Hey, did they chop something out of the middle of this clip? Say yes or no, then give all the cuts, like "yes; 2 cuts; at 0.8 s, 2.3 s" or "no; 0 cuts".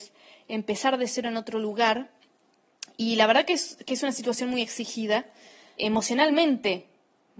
yes; 1 cut; at 5.8 s